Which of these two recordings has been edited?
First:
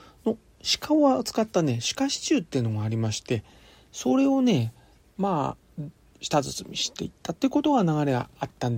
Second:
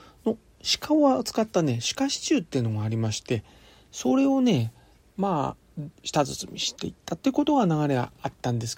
second; 1 cut; at 6.0 s

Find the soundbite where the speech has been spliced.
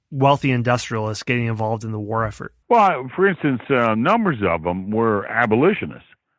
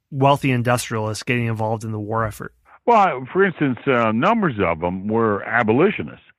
first; 1 cut; at 2.6 s

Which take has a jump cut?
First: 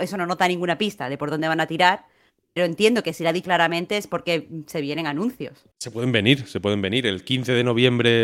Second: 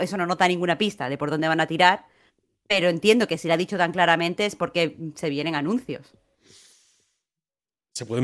first; 3 cuts; at 2.6 s, 3.4 s, 5.7 s

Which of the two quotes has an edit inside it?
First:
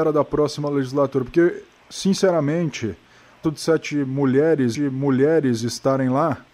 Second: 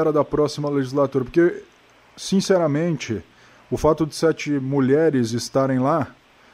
first; 3 cuts; at 1.8 s, 3.4 s, 4.7 s

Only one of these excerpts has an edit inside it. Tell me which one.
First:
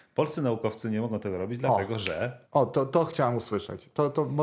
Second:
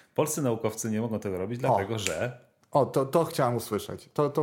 first; 1 cut; at 2.5 s

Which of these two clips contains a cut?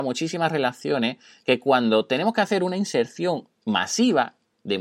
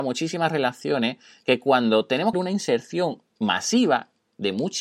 second; 1 cut; at 2.3 s

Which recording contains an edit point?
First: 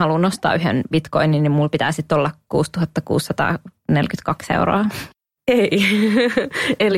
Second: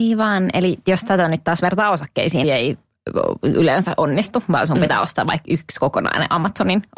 second; 1 cut; at 2.4 s

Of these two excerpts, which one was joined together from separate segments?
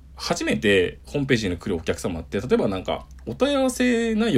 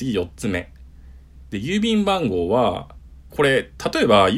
second; 1 cut; at 3.3 s

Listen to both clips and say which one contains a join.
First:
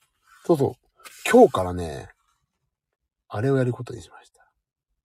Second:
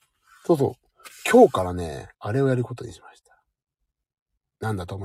second; 1 cut; at 2.1 s

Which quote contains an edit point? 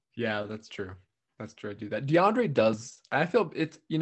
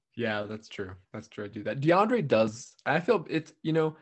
second; 1 cut; at 1.0 s

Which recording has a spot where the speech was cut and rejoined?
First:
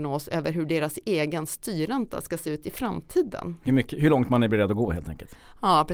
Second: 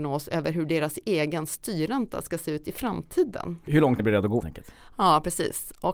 second; 3 cuts; at 3.7 s, 4.0 s, 4.4 s

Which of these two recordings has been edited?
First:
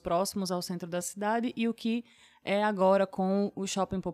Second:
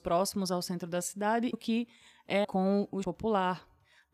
second; 3 cuts; at 1.5 s, 2.4 s, 3.0 s

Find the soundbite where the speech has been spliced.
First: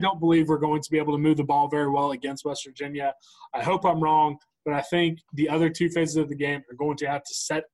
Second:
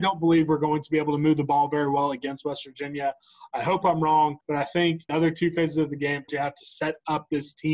second; 3 cuts; at 4.4 s, 5.1 s, 6.3 s

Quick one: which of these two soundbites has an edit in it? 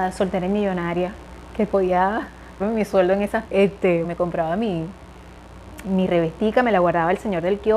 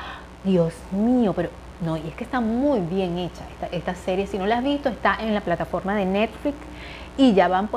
first; 4 cuts; at 2.6 s, 3.4 s, 4.0 s, 5.8 s

